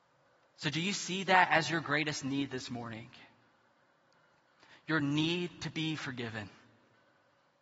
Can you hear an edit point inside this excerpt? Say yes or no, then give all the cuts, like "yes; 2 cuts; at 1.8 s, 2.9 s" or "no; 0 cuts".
no; 0 cuts